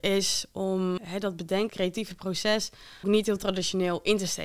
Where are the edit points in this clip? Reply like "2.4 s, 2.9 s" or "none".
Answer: 1.0 s, 1.7 s, 3.0 s